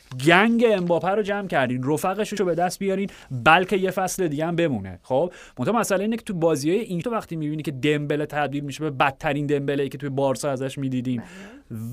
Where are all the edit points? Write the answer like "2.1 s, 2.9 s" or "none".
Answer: 2.4 s, 7.0 s